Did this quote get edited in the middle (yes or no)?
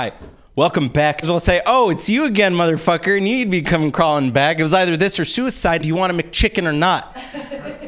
yes